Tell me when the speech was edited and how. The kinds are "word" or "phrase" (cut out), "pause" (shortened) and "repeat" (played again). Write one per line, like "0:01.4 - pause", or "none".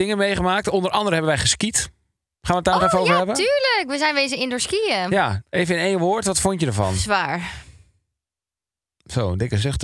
none